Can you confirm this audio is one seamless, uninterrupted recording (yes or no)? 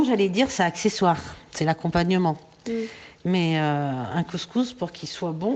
yes